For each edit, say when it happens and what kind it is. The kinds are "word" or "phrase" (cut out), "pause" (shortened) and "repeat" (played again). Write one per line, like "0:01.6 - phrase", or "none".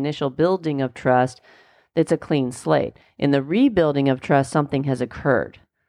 none